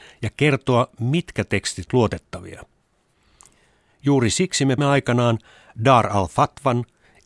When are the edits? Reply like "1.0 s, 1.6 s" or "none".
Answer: 1.9 s, 4.8 s